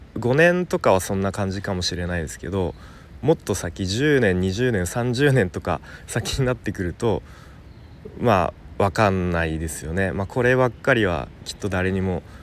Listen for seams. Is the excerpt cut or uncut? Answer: uncut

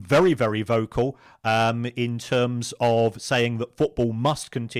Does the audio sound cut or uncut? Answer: uncut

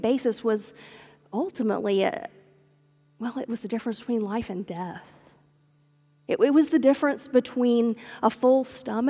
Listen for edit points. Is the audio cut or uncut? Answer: uncut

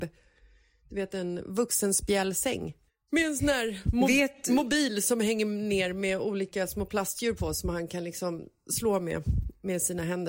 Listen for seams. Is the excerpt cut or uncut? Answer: cut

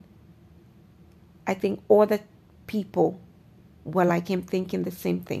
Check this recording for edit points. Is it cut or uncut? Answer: uncut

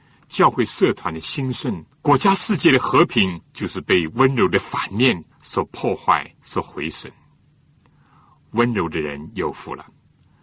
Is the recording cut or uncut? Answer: cut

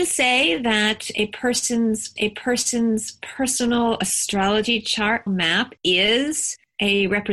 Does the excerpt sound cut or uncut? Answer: cut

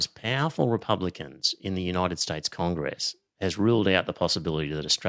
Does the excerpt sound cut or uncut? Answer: uncut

